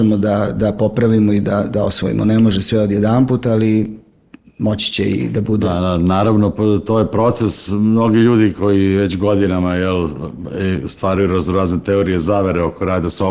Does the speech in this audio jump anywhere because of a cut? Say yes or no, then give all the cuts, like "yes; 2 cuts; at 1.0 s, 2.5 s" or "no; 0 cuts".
no; 0 cuts